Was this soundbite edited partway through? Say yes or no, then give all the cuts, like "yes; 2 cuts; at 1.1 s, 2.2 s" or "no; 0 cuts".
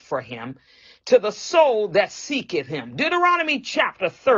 no; 0 cuts